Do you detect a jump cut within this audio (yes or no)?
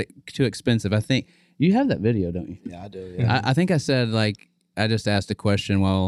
no